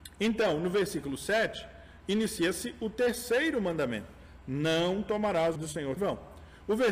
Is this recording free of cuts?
no; 2 cuts; at 5.6 s, 6.0 s

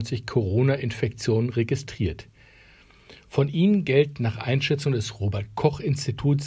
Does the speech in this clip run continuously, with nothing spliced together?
yes; 0 cuts

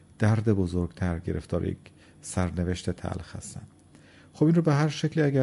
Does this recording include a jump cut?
no; 0 cuts

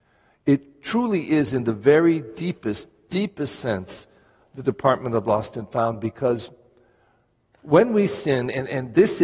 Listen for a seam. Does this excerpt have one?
no; 0 cuts

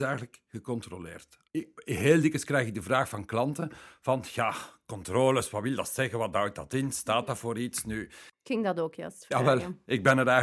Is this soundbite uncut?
no; 1 cut; at 1.5 s

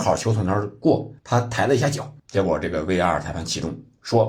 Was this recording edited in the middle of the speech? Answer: yes; 2 cuts; at 1.2 s, 2.2 s

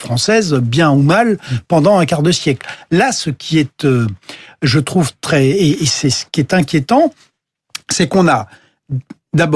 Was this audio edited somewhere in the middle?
no; 0 cuts

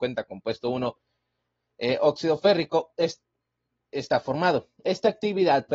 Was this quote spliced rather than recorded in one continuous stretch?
no; 0 cuts

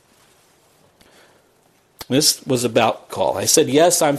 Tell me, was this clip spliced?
yes; 1 cut; at 3.1 s

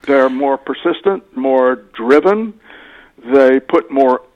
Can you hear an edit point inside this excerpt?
yes; 1 cut; at 1.4 s

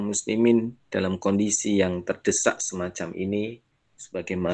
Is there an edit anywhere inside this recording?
no; 0 cuts

